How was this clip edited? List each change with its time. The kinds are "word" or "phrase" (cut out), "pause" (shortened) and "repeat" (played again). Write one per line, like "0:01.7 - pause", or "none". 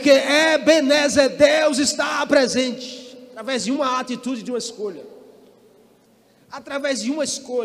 none